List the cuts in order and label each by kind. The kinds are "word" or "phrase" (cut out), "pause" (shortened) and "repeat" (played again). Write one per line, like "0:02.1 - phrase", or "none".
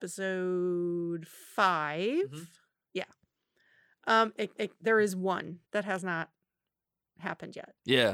0:04.5 - repeat
0:05.6 - pause